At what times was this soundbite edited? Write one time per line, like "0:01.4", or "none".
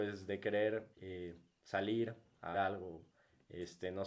0:00.9
0:02.5